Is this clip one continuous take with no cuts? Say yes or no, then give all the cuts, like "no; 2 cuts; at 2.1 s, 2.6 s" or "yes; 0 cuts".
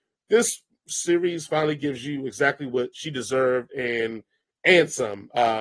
yes; 0 cuts